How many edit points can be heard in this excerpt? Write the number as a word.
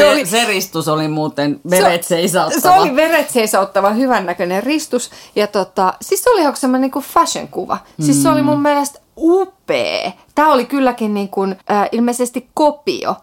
two